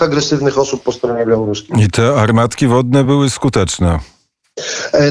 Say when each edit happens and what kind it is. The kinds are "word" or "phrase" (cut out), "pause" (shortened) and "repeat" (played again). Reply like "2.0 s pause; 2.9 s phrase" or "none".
none